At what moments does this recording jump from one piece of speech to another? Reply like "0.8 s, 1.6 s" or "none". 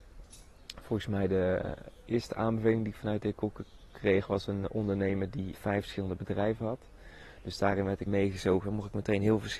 5.5 s, 8.1 s